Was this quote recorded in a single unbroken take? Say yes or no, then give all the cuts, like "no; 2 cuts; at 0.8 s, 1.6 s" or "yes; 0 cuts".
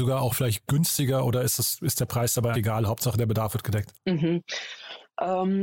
no; 2 cuts; at 2.5 s, 3.9 s